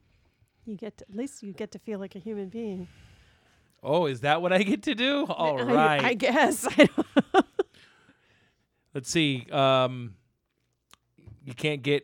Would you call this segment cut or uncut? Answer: uncut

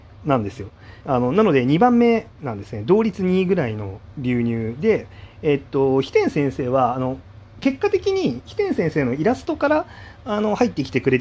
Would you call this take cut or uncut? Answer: cut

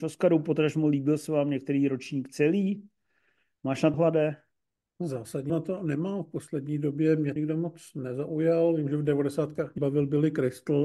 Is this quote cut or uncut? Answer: cut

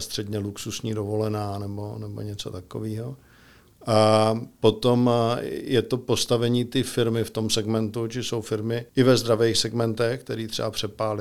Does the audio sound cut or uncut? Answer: cut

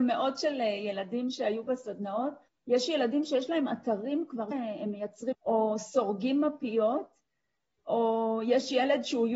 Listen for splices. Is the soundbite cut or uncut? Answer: cut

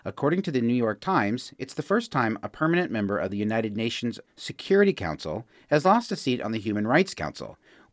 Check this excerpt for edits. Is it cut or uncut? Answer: uncut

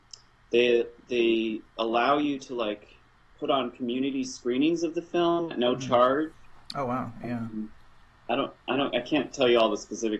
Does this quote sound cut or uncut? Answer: uncut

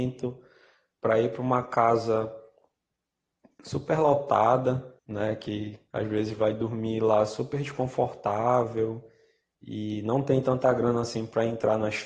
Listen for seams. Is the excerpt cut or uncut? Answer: cut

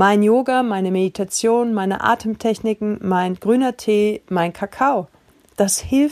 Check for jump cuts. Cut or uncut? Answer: uncut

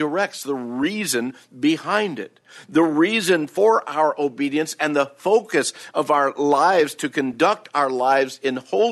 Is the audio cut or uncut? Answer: uncut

